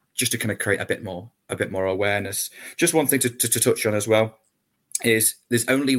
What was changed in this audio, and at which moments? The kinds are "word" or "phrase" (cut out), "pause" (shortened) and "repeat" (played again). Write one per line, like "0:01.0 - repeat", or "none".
none